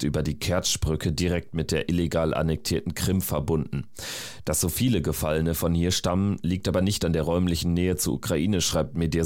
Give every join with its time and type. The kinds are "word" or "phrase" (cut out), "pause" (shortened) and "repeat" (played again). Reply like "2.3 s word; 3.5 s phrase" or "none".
none

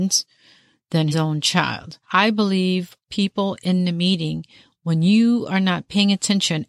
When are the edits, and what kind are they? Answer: 1.1 s word; 2.0 s pause; 3.0 s pause

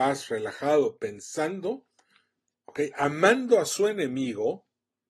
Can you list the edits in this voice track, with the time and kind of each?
none

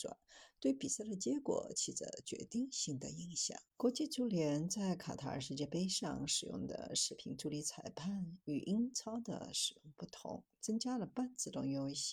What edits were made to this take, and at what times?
3.7 s pause

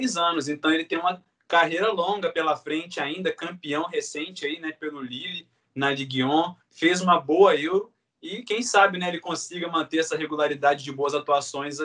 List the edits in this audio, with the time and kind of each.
none

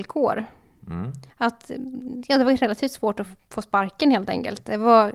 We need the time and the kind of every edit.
1.3 s pause

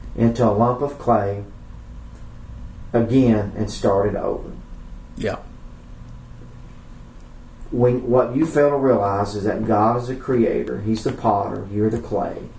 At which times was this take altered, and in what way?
none

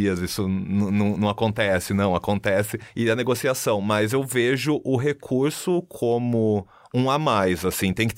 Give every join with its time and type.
none

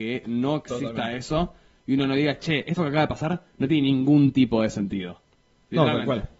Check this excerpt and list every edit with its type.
none

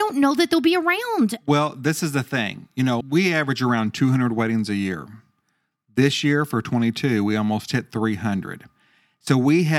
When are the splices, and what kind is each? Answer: 3.0 s word

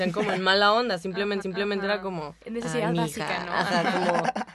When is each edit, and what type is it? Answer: 1.4 s repeat; 2.4 s pause

